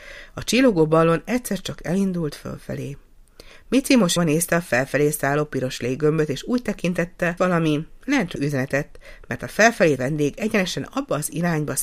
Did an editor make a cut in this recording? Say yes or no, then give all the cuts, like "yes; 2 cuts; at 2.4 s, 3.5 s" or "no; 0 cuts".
yes; 4 cuts; at 4.2 s, 7.4 s, 8.4 s, 10.0 s